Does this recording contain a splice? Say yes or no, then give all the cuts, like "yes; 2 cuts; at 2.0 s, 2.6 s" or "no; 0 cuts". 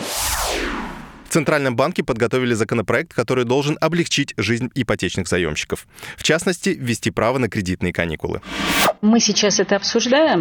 yes; 1 cut; at 9.0 s